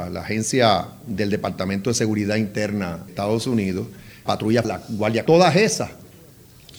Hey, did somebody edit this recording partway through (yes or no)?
yes